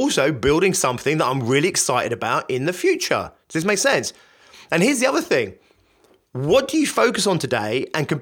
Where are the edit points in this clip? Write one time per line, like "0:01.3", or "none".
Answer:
none